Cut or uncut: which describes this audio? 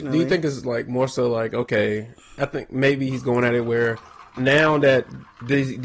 cut